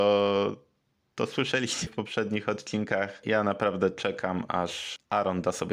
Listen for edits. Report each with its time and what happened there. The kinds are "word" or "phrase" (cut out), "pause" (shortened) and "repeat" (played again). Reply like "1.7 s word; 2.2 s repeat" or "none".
1.9 s word